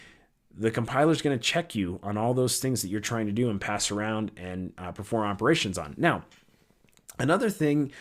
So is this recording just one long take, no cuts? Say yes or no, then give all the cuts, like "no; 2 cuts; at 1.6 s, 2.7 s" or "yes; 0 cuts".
yes; 0 cuts